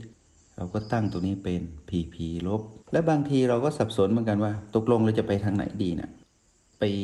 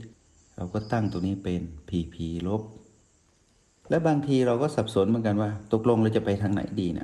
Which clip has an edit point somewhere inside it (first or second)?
first